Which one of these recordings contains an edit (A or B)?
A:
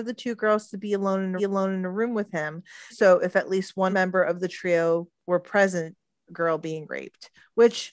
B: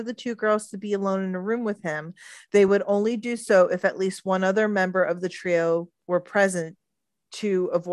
A